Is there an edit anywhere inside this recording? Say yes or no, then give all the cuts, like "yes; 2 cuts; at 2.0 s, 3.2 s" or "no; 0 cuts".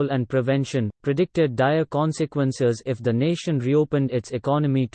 no; 0 cuts